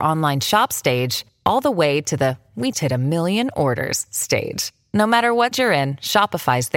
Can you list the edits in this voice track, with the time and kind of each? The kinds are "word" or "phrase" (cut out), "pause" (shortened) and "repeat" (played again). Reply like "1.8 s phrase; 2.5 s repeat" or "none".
2.7 s word; 5.5 s word

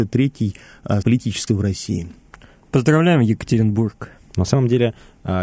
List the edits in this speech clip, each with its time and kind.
1.0 s word; 1.5 s word

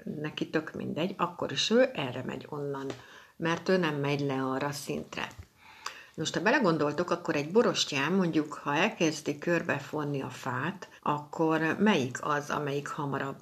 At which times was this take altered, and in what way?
11.0 s pause

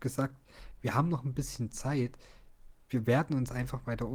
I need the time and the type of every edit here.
none

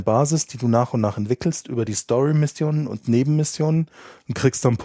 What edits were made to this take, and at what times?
none

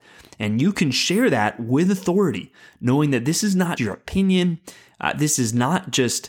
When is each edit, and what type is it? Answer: 3.8 s word

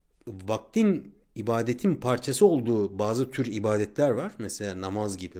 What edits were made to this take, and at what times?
none

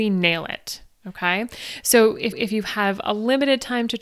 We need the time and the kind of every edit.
2.3 s repeat

